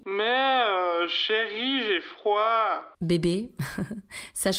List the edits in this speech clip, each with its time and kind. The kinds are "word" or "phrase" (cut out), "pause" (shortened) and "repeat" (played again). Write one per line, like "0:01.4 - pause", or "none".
none

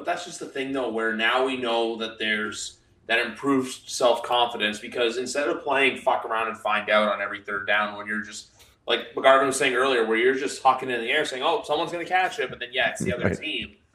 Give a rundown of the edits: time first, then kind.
none

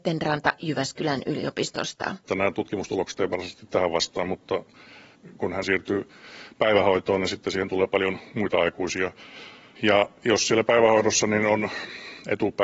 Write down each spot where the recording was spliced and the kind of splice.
0:02.2 - pause
0:05.6 - word

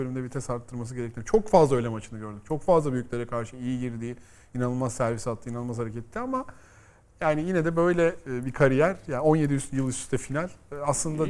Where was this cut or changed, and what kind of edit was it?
none

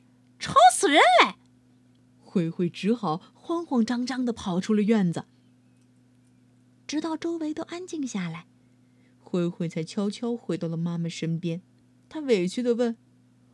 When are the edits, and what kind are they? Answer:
0:11.8 - pause

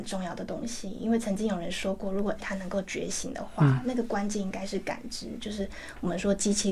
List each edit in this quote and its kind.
0:02.4 - word

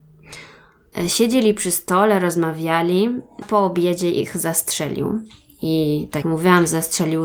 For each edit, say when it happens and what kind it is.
0:03.4 - word
0:06.2 - word

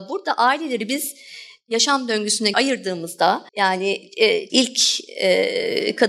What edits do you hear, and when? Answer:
0:02.5 - word
0:03.5 - pause
0:04.5 - word

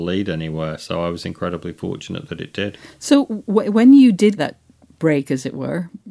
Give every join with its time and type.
0:04.4 - word

